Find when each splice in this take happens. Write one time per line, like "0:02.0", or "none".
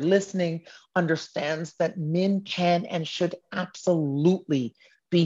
none